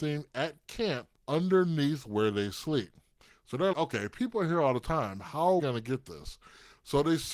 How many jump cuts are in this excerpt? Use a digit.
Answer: 3